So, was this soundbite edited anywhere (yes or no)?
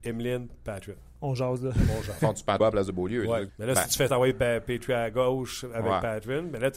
yes